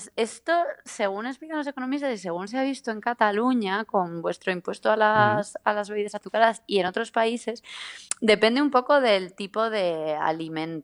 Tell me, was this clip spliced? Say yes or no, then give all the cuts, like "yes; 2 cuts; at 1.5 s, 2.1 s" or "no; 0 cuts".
no; 0 cuts